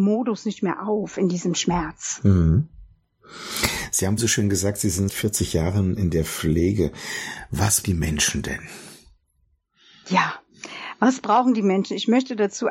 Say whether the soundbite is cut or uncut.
cut